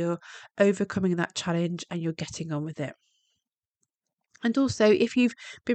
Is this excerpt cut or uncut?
uncut